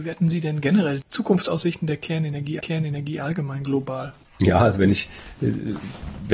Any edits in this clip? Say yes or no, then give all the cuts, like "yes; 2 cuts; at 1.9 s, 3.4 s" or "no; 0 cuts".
yes; 3 cuts; at 1.0 s, 2.6 s, 4.2 s